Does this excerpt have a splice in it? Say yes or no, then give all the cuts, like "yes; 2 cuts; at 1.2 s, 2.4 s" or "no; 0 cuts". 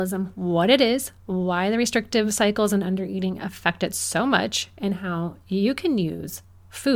no; 0 cuts